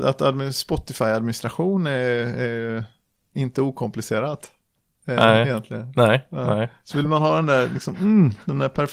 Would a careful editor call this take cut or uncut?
uncut